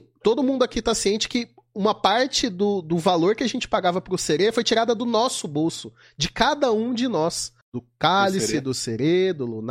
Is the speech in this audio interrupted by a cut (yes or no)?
yes